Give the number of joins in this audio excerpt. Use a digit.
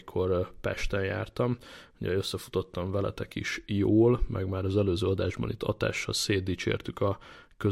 0